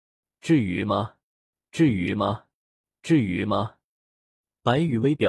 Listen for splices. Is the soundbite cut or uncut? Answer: uncut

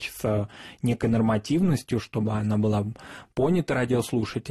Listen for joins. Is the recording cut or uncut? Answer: uncut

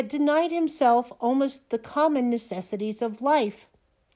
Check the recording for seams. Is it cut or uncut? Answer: uncut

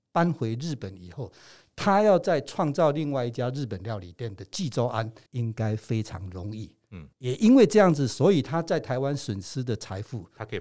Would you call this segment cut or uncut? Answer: cut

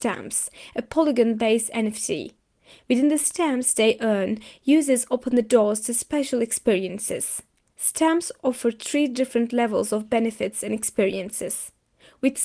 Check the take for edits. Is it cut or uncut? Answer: uncut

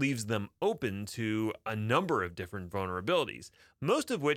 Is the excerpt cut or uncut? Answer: uncut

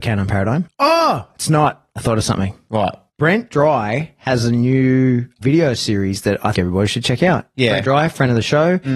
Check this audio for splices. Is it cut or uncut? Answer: cut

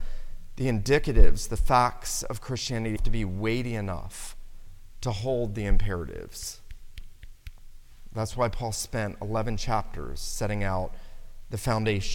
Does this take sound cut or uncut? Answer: cut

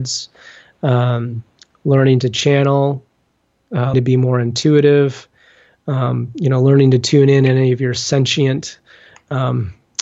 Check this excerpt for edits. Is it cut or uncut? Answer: cut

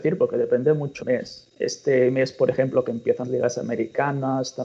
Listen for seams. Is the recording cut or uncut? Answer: cut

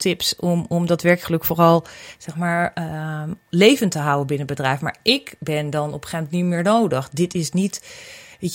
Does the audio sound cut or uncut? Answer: uncut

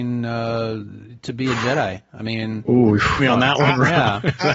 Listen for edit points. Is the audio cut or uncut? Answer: cut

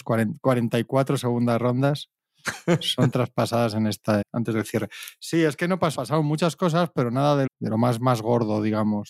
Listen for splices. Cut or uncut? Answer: cut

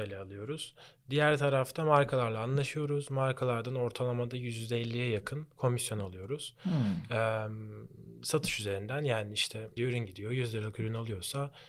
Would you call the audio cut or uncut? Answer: cut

